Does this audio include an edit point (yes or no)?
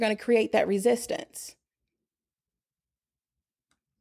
no